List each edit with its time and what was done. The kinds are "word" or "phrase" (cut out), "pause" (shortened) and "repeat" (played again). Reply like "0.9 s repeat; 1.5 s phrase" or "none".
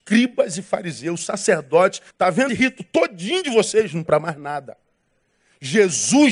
2.1 s word; 2.5 s word; 4.1 s word